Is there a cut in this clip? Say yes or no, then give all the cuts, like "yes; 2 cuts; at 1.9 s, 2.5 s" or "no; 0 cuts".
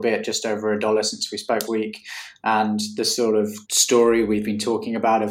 yes; 2 cuts; at 1.7 s, 3.6 s